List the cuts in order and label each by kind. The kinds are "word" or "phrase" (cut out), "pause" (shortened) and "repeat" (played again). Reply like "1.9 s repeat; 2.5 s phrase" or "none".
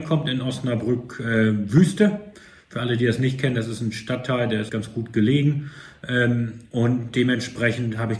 4.7 s word